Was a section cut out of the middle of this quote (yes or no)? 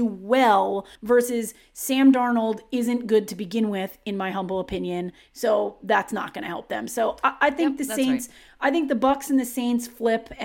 yes